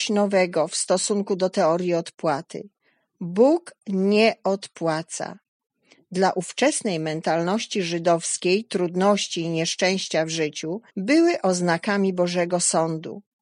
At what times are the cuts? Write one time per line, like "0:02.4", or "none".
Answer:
0:10.9